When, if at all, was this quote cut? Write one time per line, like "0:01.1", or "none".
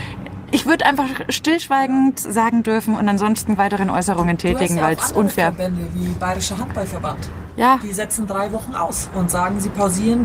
0:02.6
0:03.6
0:09.1